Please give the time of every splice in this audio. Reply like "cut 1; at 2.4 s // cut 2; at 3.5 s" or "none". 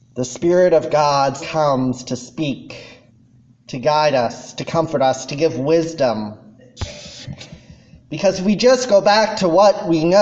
cut 1; at 1.4 s // cut 2; at 3.1 s // cut 3; at 5.3 s